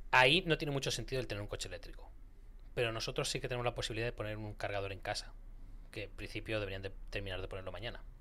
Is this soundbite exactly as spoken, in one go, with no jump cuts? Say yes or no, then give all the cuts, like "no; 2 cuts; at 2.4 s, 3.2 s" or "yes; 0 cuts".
yes; 0 cuts